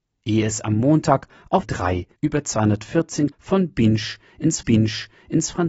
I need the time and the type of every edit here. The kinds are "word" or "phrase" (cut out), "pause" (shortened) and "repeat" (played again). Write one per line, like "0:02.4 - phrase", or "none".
0:01.6 - word
0:02.2 - pause
0:03.3 - word
0:04.6 - repeat